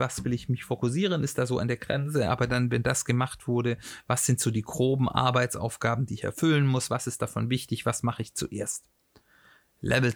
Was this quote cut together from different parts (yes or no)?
no